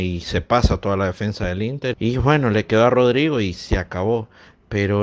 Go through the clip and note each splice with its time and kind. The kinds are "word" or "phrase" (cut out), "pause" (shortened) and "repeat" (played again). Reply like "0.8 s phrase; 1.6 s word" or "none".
1.9 s word